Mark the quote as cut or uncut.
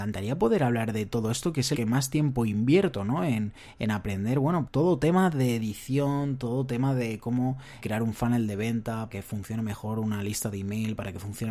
cut